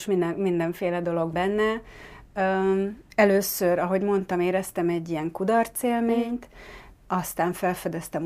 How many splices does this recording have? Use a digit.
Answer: 2